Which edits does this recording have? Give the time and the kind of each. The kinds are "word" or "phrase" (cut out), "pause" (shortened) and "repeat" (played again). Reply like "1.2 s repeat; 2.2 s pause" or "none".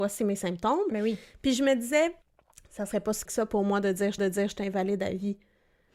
2.2 s pause; 3.3 s word; 4.2 s repeat